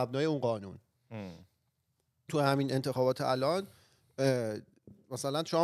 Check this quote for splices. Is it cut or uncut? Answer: cut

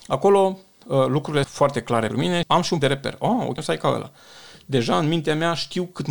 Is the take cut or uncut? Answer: cut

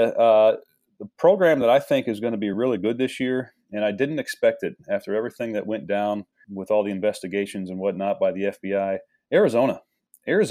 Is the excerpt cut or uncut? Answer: uncut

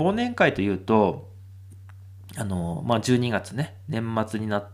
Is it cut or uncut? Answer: uncut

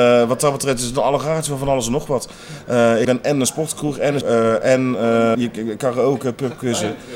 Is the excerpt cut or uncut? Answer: cut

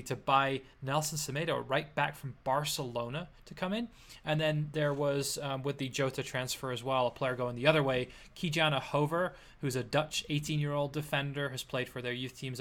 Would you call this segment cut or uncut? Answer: uncut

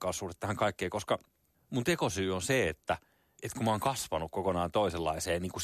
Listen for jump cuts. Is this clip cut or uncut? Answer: uncut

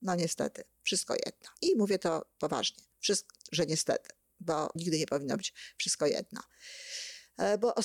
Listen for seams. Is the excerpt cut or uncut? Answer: cut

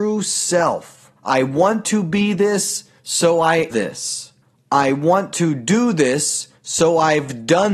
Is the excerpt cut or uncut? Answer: cut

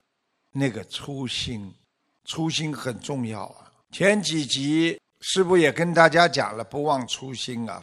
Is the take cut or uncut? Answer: cut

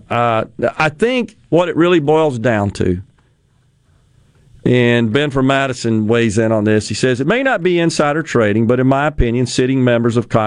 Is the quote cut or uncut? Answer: uncut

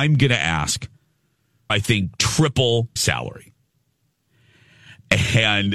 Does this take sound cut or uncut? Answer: cut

